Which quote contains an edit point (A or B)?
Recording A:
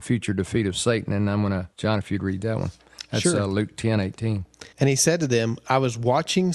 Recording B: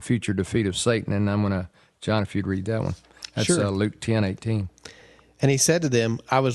A